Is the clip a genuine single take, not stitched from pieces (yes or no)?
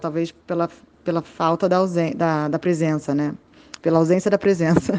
yes